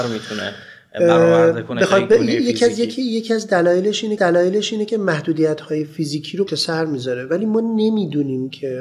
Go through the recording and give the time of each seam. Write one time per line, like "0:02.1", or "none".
0:04.2
0:06.5